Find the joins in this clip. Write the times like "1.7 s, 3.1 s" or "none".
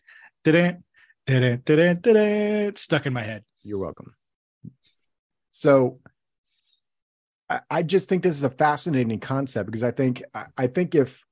2.0 s